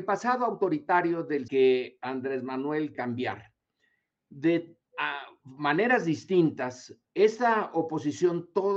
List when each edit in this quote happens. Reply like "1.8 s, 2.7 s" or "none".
1.5 s, 2.9 s, 4.9 s, 7.0 s